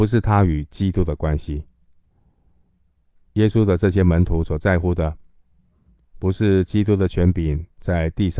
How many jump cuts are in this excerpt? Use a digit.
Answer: 1